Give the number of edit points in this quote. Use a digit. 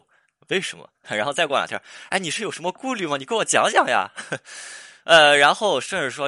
1